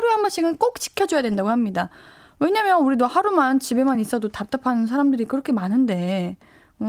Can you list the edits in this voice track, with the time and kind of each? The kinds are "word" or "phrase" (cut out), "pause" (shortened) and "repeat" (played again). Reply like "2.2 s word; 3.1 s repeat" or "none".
none

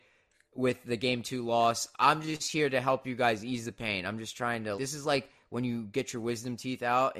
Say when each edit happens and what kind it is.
4.8 s word

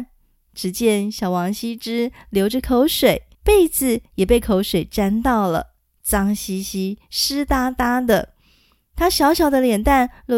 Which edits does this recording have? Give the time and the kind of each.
3.3 s pause

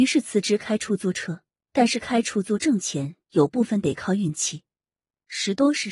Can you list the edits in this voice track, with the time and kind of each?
1.6 s pause

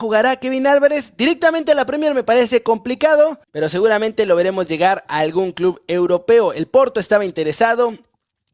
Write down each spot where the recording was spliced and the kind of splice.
3.4 s pause

